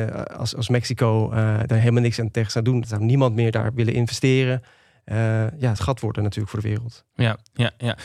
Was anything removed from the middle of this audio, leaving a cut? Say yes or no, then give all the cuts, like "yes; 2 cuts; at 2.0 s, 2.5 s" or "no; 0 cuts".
yes; 2 cuts; at 2.8 s, 5.8 s